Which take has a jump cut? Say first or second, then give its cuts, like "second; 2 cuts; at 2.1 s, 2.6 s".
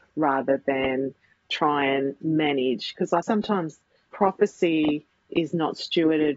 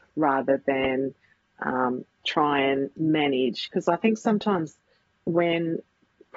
first; 3 cuts; at 1.4 s, 3.2 s, 4.1 s